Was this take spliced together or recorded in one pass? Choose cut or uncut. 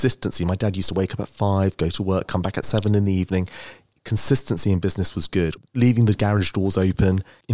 uncut